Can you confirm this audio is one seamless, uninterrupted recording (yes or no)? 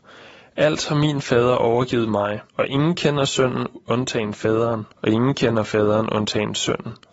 no